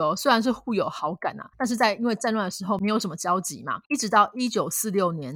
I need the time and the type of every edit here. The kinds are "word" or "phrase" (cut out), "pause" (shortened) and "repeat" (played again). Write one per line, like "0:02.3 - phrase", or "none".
0:01.5 - pause
0:03.8 - pause